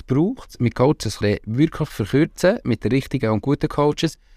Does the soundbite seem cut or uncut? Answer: cut